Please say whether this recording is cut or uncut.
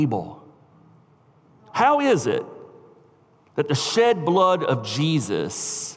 uncut